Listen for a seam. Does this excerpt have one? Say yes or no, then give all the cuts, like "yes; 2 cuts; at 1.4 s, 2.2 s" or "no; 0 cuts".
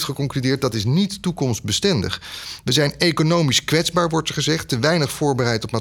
no; 0 cuts